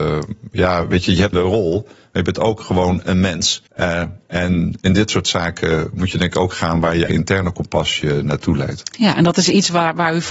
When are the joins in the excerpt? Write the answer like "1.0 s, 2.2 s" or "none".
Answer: 1.3 s, 3.7 s, 7.1 s